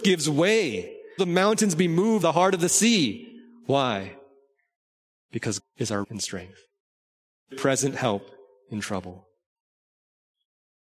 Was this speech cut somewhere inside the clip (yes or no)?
yes